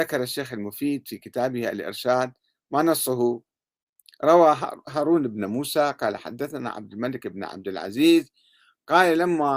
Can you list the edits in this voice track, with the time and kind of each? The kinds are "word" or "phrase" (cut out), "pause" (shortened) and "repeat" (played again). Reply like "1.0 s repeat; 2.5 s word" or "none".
none

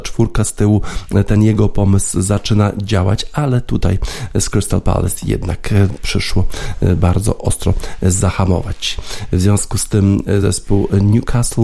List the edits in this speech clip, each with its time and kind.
none

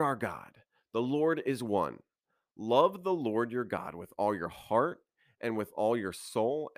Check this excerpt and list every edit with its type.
none

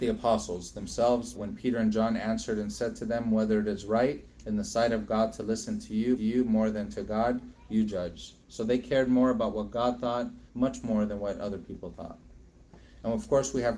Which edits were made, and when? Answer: 1.3 s word; 6.2 s repeat; 8.4 s pause; 10.5 s pause

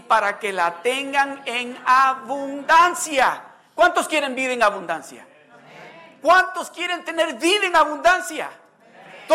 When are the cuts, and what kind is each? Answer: none

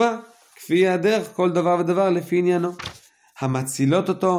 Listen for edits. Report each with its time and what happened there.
none

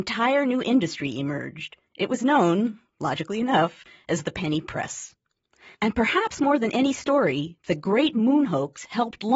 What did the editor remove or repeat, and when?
none

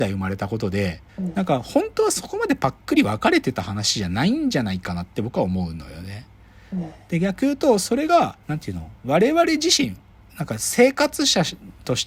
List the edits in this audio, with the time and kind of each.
1.1 s pause; 8.4 s pause; 9.0 s pause

